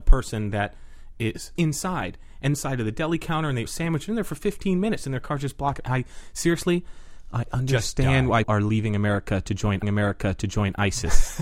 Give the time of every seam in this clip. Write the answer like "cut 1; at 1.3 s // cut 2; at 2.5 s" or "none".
cut 1; at 1.6 s // cut 2; at 2.5 s // cut 3; at 3.7 s // cut 4; at 8.4 s // cut 5; at 9.8 s